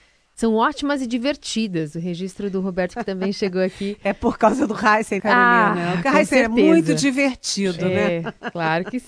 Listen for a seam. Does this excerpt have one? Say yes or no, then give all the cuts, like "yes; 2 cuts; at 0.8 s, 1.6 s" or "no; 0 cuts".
yes; 1 cut; at 5.2 s